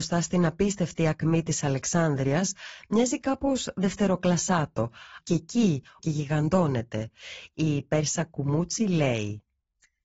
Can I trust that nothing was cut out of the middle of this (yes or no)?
no